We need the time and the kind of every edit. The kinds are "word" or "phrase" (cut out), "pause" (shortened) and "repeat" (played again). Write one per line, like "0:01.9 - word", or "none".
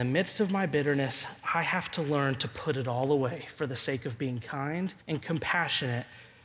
0:05.0 - pause

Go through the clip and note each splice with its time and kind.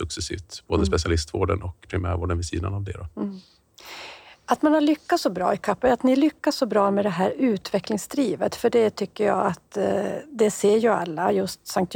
none

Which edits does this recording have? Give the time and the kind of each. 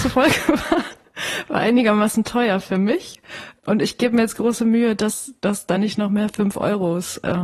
none

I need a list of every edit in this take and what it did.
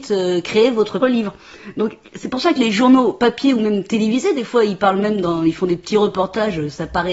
0:01.0 - word

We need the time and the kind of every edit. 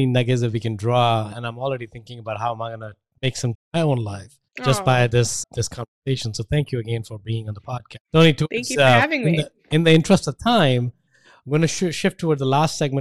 0:03.5 - word
0:04.5 - pause
0:05.4 - word

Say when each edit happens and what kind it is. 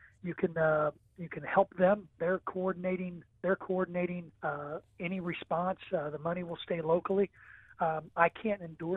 0:04.4 - pause

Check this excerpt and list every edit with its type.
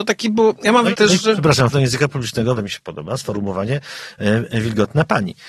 0:00.9 - word
0:01.7 - word
0:02.6 - word

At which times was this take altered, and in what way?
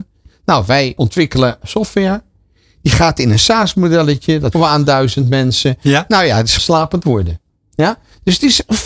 0:01.0 - word
0:01.6 - word
0:04.5 - word
0:06.6 - word
0:07.0 - word

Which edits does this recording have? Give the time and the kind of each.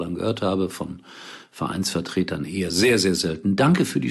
none

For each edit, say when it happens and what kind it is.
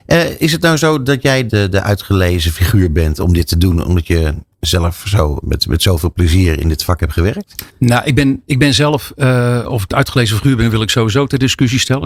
0:01.5 - word
0:05.4 - word
0:07.7 - pause

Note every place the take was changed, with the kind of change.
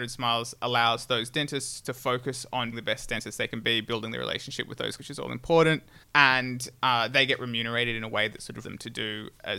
0:02.7 - word
0:05.0 - word
0:06.0 - pause
0:08.6 - word

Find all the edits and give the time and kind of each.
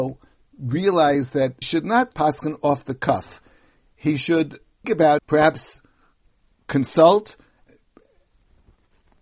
0:01.6 - word
0:02.1 - word
0:04.8 - word
0:05.2 - word

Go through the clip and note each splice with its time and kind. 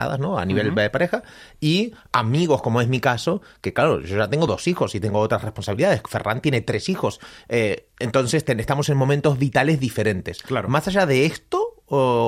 none

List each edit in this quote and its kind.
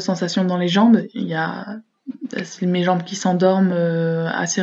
none

